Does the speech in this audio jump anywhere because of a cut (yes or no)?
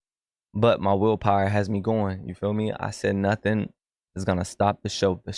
no